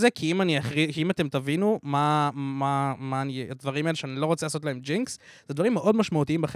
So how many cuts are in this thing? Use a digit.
0